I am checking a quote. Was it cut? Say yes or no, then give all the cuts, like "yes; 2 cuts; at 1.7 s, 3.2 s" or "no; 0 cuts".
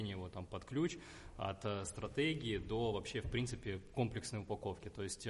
no; 0 cuts